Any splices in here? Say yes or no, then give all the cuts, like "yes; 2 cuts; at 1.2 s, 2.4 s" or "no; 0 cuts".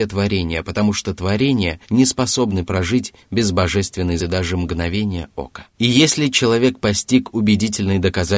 yes; 3 cuts; at 1.8 s, 4.2 s, 5.7 s